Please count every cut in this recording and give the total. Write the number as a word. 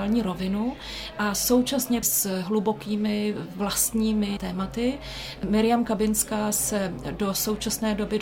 two